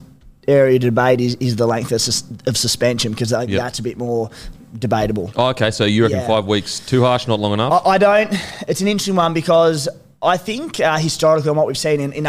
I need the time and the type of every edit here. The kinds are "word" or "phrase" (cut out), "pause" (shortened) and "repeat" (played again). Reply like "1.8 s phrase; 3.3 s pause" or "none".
none